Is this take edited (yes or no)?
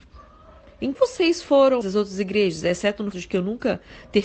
yes